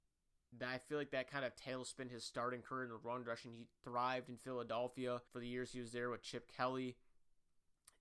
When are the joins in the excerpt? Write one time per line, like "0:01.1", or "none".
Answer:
0:05.3